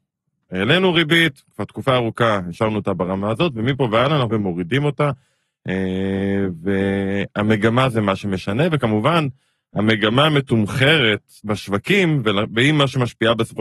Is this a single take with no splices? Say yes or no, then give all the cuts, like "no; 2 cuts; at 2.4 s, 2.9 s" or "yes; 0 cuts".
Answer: no; 2 cuts; at 4.3 s, 11.4 s